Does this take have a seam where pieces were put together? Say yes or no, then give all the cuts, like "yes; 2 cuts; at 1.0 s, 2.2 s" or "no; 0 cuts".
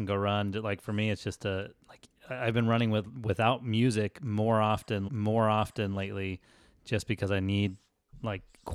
yes; 1 cut; at 5.1 s